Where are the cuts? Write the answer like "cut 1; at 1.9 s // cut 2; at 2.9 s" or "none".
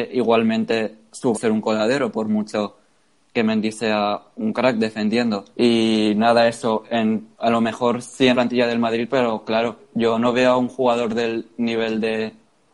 cut 1; at 1.3 s // cut 2; at 3.3 s // cut 3; at 5.5 s // cut 4; at 7.3 s // cut 5; at 8.3 s // cut 6; at 9.8 s